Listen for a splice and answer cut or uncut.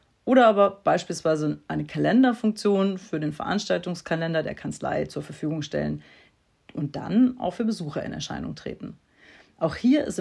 uncut